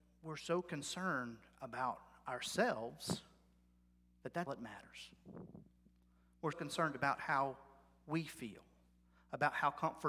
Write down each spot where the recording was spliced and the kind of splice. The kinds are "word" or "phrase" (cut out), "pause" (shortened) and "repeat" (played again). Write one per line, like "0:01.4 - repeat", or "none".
0:04.5 - word
0:06.5 - word